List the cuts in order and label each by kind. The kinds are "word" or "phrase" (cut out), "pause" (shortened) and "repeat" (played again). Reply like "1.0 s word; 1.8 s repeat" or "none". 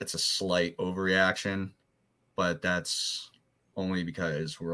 none